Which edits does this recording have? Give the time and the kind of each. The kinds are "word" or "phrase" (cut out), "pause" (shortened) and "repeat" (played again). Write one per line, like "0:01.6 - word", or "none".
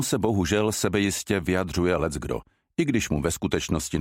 none